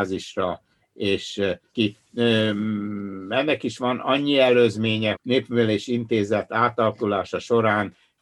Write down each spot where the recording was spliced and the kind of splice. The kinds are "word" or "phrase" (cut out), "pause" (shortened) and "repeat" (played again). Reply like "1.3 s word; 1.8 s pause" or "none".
1.7 s word; 5.1 s phrase